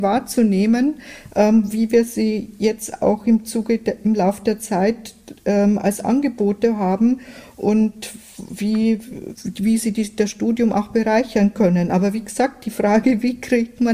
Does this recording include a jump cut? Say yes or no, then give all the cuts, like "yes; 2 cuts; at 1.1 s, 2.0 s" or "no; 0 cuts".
yes; 1 cut; at 9.3 s